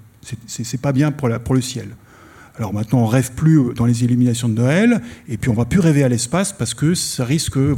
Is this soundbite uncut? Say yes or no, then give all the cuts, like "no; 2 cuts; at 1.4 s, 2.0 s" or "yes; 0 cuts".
no; 1 cut; at 2.7 s